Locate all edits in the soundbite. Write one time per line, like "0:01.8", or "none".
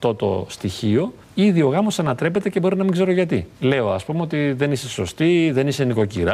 0:01.2
0:03.5

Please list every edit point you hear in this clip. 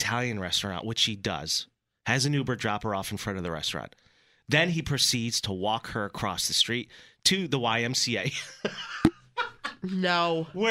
none

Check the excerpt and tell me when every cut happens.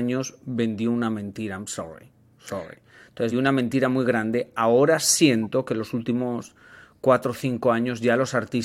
0:03.3

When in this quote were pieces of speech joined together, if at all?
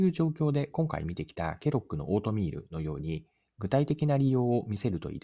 none

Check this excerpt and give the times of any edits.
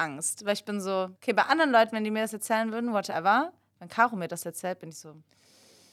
0:01.2

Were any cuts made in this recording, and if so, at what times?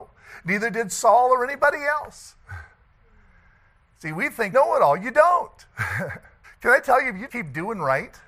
0:02.8
0:04.5
0:06.4
0:07.3

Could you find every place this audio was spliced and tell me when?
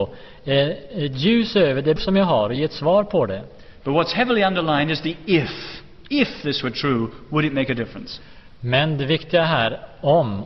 0:02.0

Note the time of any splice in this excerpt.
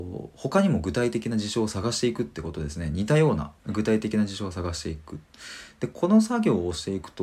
0:03.6

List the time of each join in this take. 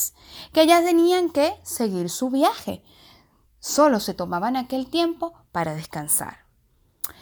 none

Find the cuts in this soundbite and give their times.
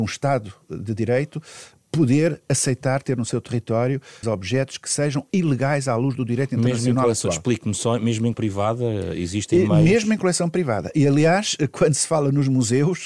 0:04.2
0:08.3

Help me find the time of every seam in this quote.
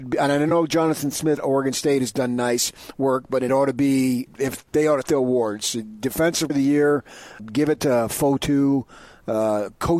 0:01.4
0:03.5
0:04.3
0:04.7
0:05.0
0:06.5
0:07.4

